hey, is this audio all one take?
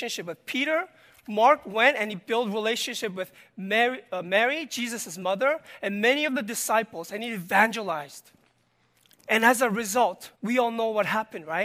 no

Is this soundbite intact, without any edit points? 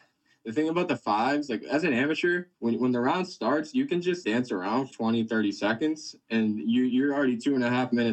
no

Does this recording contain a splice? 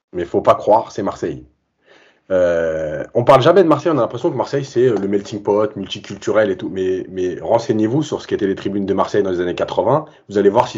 no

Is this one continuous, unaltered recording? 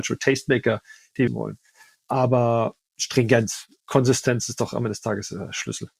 no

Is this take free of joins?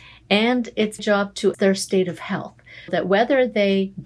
no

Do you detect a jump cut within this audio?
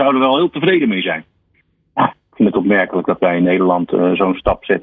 no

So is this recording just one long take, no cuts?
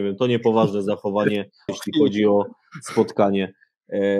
no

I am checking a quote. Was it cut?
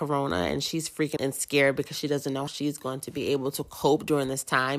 yes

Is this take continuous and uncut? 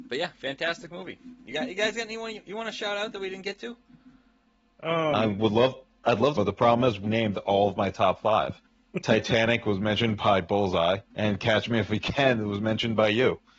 no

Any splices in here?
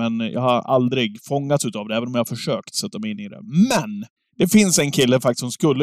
yes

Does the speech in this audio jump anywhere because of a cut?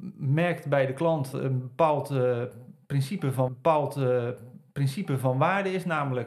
yes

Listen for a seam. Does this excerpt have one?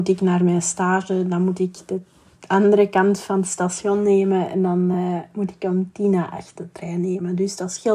no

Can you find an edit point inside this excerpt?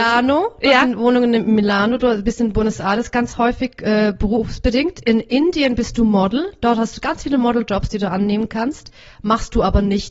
no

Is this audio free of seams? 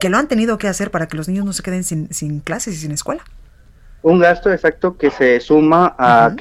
yes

